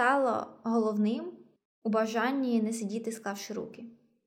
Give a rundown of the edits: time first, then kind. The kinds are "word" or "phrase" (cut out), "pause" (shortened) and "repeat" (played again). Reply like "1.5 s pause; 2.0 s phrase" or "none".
1.6 s pause